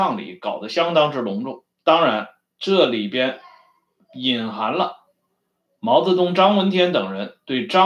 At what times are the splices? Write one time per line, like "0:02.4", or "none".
0:01.7